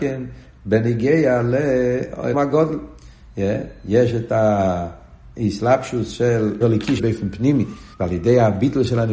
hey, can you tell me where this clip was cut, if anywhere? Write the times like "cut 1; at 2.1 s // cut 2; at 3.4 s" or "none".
cut 1; at 2.3 s // cut 2; at 6.6 s // cut 3; at 7.0 s // cut 4; at 7.9 s